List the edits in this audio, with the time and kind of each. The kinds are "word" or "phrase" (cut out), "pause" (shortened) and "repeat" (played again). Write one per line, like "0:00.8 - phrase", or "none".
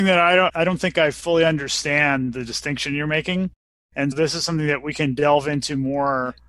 0:04.1 - word